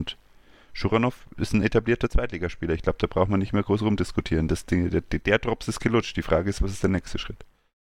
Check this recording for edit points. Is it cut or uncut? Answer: uncut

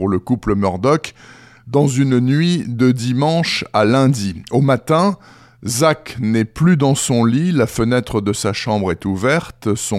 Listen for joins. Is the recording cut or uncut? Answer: uncut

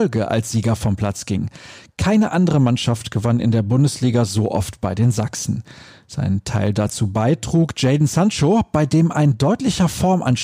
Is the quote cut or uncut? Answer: uncut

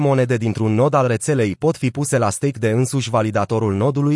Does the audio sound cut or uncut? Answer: uncut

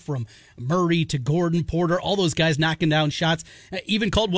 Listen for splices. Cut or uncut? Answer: uncut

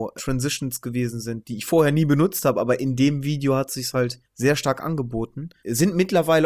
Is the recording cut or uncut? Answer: uncut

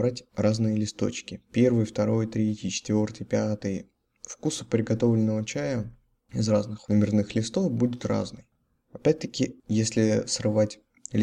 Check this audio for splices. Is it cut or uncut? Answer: uncut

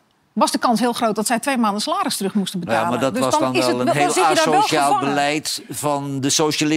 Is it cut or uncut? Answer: uncut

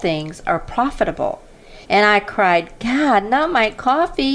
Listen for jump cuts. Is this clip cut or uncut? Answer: cut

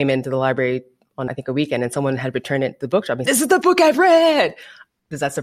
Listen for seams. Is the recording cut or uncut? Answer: cut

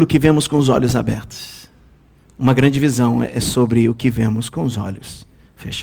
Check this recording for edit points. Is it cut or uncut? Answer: uncut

